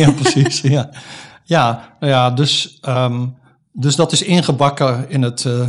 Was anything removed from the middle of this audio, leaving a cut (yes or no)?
no